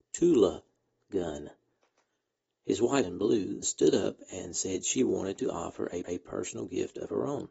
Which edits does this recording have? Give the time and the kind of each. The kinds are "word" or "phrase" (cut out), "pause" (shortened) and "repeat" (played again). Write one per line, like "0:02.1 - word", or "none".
0:03.0 - phrase
0:03.6 - word
0:06.0 - repeat